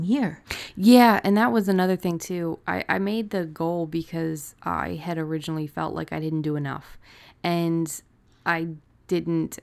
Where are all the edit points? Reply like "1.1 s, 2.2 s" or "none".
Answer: none